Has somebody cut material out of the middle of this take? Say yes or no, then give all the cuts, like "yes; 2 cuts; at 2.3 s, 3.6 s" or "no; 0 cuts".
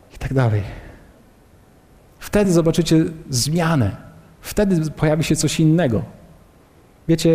no; 0 cuts